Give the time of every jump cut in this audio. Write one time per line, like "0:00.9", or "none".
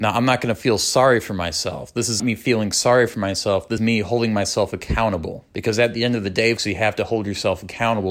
0:02.2
0:03.8
0:05.5
0:06.6